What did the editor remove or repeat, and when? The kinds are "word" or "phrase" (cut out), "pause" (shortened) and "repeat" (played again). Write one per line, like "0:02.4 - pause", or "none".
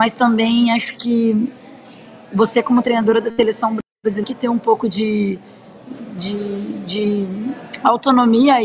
0:03.9 - pause